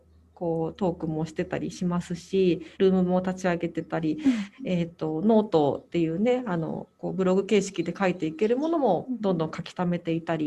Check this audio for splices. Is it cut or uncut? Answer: cut